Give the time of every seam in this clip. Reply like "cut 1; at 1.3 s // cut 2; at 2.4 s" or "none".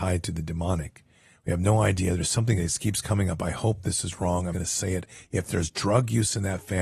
cut 1; at 4.5 s

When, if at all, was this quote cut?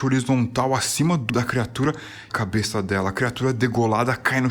cut 1; at 1.3 s // cut 2; at 2.3 s

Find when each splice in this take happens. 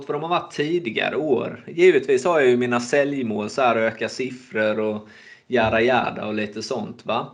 none

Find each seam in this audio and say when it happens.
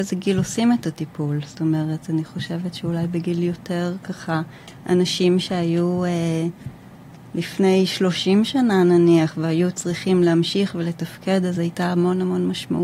none

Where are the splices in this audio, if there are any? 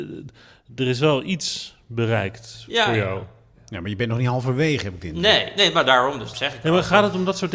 cut 1; at 6.3 s

